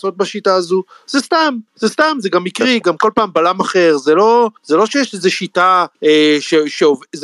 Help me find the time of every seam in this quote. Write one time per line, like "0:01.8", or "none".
0:01.7
0:04.6
0:05.9